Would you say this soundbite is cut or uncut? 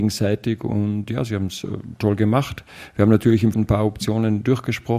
cut